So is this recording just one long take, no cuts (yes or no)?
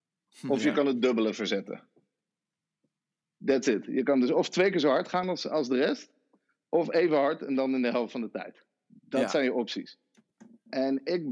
yes